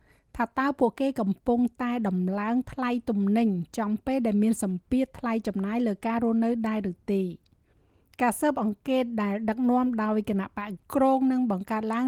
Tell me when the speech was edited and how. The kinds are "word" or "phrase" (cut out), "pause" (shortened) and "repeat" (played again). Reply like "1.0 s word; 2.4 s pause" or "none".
10.8 s word